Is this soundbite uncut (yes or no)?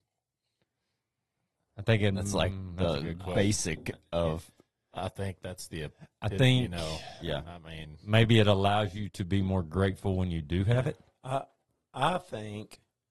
yes